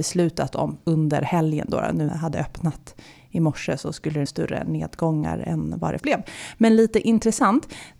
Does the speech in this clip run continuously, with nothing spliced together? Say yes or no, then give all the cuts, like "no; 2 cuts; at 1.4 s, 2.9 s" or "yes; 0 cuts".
no; 3 cuts; at 2.1 s, 4.3 s, 6.0 s